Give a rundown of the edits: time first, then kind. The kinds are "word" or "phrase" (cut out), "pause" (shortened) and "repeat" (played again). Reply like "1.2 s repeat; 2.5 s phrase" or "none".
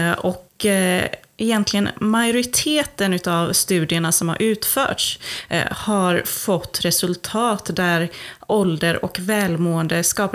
none

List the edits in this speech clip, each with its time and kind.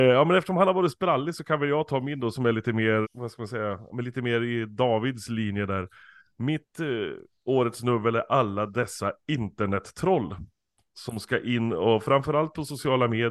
3.0 s word

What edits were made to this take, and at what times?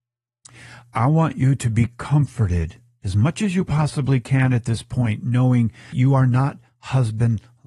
5.9 s word

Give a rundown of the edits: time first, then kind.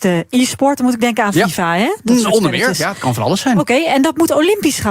none

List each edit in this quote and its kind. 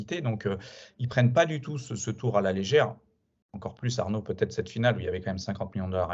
none

